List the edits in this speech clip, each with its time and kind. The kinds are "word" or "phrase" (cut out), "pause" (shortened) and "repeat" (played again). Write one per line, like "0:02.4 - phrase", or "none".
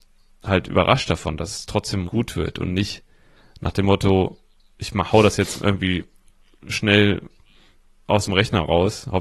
0:02.1 - word